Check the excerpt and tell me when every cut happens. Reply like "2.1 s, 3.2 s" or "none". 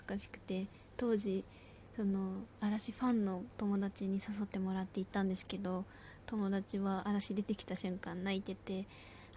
none